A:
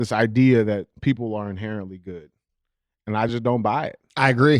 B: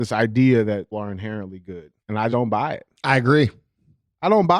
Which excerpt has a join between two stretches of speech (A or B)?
B